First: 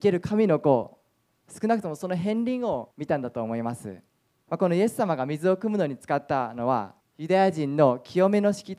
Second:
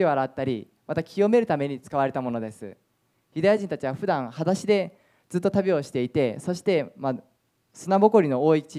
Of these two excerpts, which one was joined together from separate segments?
first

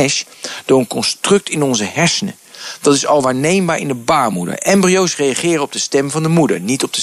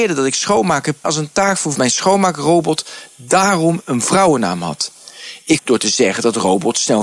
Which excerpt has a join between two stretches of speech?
second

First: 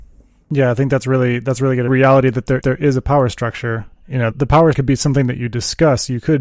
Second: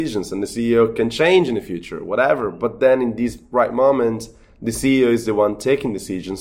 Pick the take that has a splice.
first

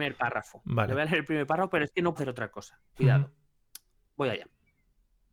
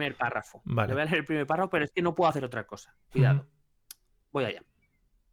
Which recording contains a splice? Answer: first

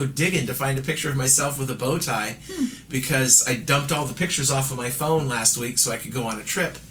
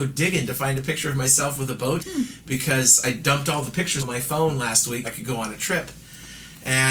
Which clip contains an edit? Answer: second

